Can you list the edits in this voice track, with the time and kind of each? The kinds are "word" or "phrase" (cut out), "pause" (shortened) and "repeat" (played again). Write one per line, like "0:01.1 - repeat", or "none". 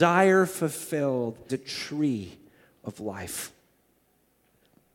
0:01.5 - word